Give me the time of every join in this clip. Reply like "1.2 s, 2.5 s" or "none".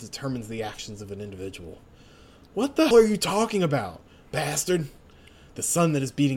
2.9 s